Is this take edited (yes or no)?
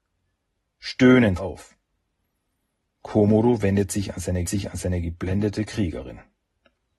yes